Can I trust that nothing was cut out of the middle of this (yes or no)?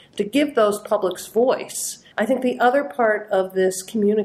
no